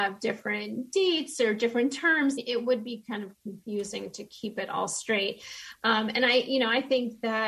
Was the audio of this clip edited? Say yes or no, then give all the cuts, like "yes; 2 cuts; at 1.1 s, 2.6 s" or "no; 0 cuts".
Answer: yes; 1 cut; at 2.4 s